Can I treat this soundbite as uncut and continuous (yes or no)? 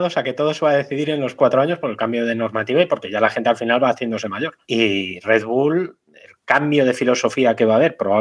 no